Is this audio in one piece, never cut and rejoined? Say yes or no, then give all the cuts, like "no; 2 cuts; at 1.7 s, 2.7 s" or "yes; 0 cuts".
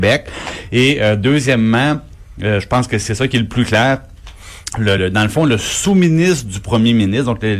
no; 1 cut; at 5.0 s